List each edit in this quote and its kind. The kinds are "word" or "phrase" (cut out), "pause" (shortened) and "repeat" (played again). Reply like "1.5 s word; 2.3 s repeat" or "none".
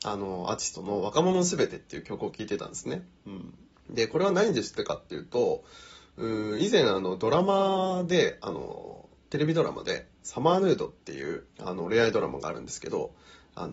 3.8 s pause; 11.5 s pause

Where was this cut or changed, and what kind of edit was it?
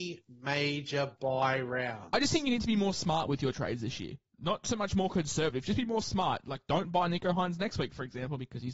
none

